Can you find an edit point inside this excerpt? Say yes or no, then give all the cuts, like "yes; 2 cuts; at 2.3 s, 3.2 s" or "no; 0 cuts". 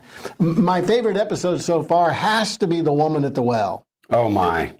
no; 0 cuts